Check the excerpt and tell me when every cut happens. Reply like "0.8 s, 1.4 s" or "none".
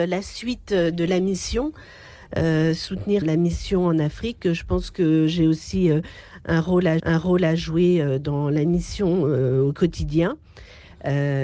3.2 s, 7.0 s